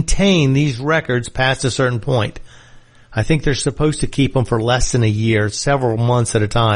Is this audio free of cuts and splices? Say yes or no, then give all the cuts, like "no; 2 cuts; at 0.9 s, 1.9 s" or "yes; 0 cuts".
yes; 0 cuts